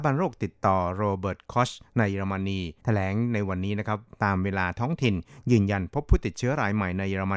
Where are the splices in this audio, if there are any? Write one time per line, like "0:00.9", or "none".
0:02.8